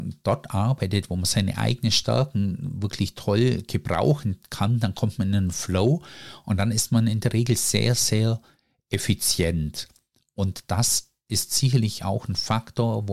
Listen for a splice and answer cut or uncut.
uncut